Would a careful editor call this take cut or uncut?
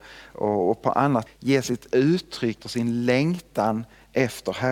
cut